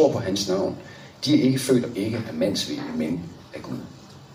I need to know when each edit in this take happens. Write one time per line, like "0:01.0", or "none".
0:01.9